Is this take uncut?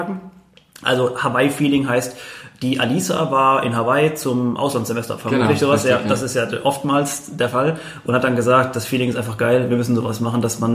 yes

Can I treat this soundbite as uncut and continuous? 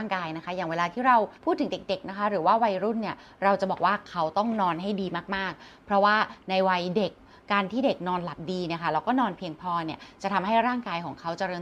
no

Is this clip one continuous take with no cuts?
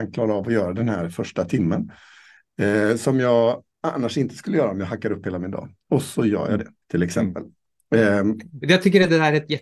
no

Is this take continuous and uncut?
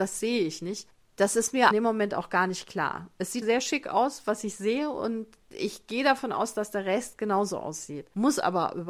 no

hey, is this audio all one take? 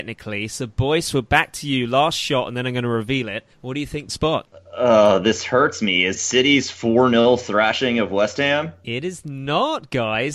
no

